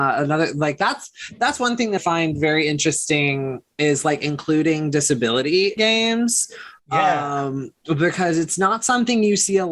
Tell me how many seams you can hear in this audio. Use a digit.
3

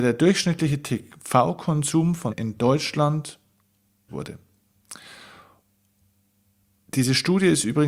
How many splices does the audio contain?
2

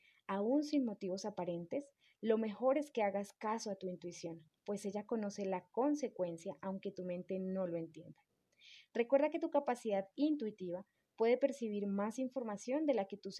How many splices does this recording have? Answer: 1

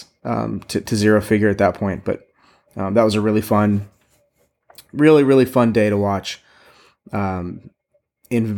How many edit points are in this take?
0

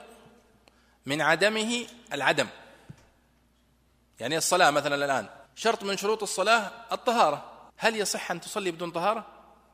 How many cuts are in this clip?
2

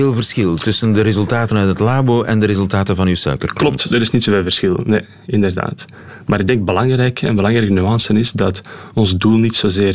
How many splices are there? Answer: 0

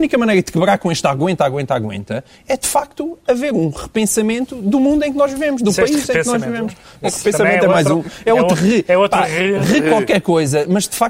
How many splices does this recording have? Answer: 0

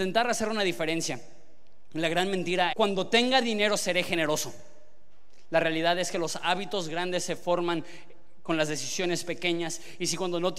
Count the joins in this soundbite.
1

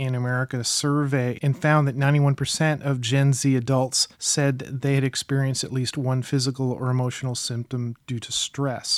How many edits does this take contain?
1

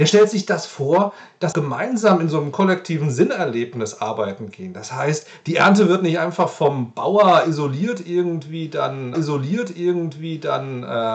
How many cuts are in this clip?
2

